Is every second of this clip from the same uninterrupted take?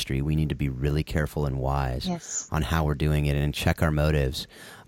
yes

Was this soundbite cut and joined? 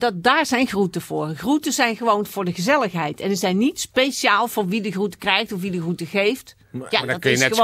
yes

